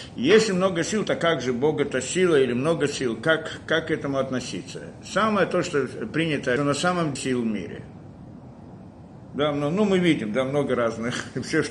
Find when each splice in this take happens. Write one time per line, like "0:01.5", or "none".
0:06.6
0:07.2